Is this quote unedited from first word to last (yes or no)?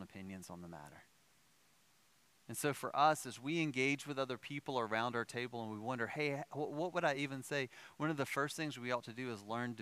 yes